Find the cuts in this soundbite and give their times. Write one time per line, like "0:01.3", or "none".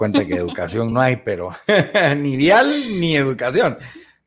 none

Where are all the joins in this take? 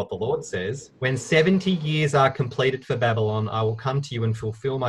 0:01.0

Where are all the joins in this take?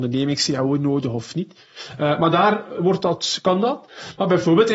0:02.8

